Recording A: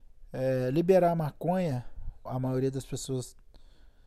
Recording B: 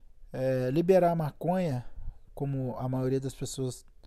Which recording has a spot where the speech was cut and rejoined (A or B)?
A